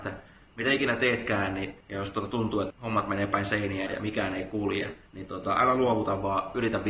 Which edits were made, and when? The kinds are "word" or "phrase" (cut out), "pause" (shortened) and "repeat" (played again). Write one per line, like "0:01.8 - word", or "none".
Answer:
0:01.8 - pause
0:02.7 - phrase
0:03.9 - word
0:05.1 - pause